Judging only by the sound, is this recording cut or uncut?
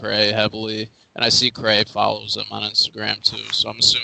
uncut